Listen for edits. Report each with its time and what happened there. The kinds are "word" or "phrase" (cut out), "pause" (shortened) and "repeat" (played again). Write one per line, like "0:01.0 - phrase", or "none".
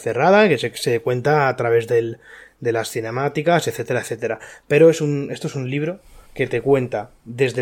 0:06.3 - pause